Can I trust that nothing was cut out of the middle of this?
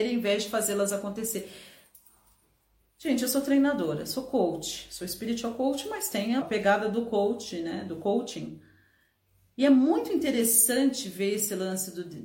no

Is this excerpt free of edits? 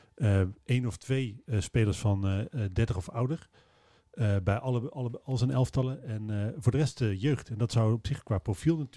yes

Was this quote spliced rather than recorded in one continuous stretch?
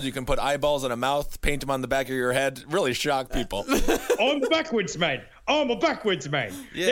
no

